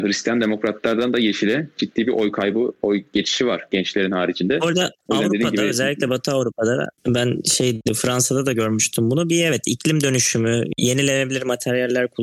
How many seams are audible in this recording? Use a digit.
0